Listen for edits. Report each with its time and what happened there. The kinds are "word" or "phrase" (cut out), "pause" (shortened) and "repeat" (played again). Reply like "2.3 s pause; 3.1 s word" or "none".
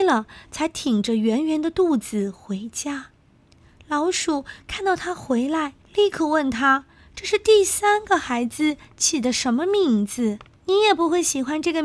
3.2 s pause; 5.8 s pause; 10.6 s pause

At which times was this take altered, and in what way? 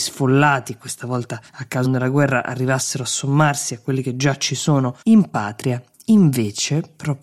1.5 s pause; 1.8 s phrase; 5.0 s pause

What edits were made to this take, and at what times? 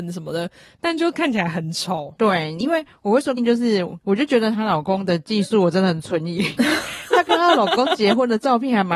3.4 s word

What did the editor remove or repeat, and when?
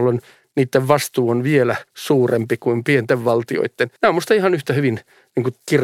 1.9 s pause; 4.0 s pause

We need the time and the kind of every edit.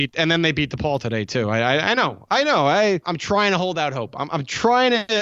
3.0 s word

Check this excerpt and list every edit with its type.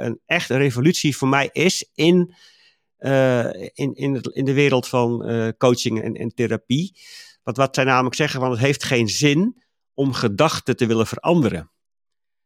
6.0 s word

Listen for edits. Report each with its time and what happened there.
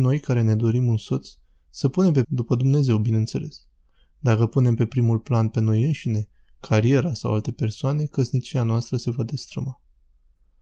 2.2 s phrase

